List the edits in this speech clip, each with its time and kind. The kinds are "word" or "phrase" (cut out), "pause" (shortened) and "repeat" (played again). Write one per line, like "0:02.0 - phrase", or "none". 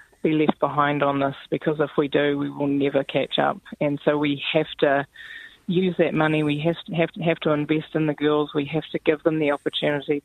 0:07.1 - repeat

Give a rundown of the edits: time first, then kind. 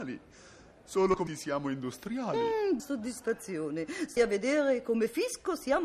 0:01.3 - word
0:02.8 - word
0:04.2 - word

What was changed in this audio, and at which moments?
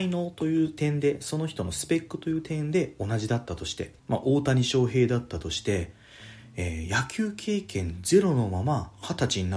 0:04.0 - pause

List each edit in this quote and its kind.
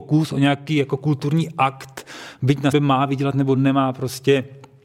0:02.7 - word

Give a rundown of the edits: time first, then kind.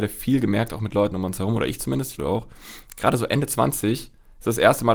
0:02.2 - word

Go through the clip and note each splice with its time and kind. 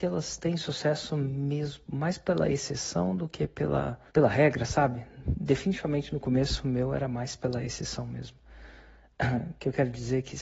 0:04.1 - pause

